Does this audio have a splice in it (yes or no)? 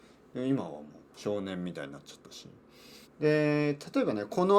yes